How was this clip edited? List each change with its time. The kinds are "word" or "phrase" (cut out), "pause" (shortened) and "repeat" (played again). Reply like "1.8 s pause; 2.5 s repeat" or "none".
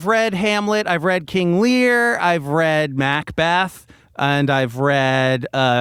none

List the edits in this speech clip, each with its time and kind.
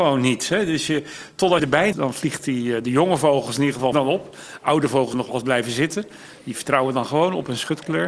1.6 s word; 1.9 s word; 3.9 s word; 5.1 s word

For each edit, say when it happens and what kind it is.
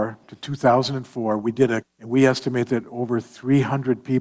1.8 s word

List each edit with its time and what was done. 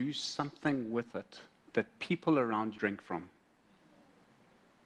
1.6 s pause; 2.7 s phrase

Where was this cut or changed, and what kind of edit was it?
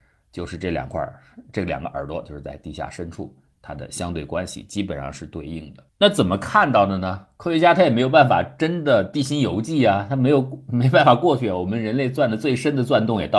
5.9 s pause

